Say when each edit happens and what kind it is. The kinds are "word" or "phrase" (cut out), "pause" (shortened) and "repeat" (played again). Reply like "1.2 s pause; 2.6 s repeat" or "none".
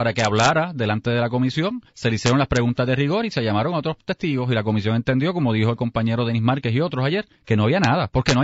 1.9 s pause; 7.4 s pause